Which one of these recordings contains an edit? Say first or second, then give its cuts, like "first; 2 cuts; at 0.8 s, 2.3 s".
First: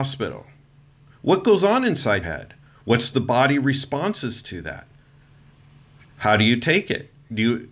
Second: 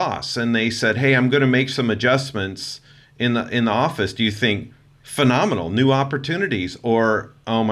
first; 1 cut; at 2.2 s